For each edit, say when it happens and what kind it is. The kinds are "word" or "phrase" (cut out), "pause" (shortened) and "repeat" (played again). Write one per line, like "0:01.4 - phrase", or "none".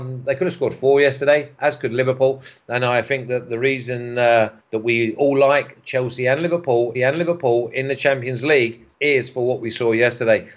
0:04.6 - pause
0:06.9 - repeat
0:08.9 - pause